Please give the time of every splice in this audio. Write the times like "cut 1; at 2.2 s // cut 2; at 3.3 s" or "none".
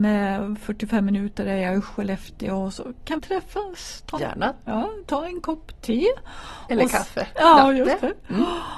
cut 1; at 3.2 s // cut 2; at 4.2 s